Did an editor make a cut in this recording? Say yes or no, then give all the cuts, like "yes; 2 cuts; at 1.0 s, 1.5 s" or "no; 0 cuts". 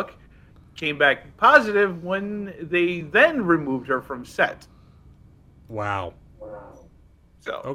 no; 0 cuts